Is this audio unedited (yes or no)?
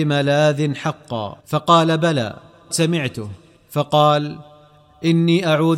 no